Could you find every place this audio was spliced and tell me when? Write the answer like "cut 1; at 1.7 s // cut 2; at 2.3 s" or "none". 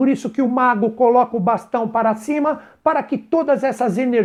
none